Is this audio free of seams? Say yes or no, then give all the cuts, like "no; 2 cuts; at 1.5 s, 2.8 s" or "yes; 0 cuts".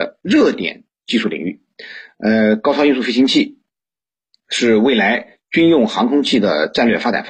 yes; 0 cuts